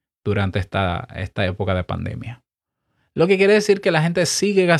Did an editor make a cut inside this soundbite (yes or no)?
no